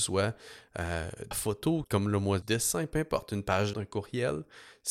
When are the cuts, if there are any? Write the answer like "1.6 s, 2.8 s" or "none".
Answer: 1.3 s, 1.8 s, 2.4 s, 3.7 s